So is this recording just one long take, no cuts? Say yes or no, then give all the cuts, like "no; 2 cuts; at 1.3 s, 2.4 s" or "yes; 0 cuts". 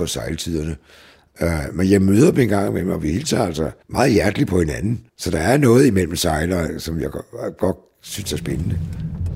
no; 2 cuts; at 3.8 s, 5.1 s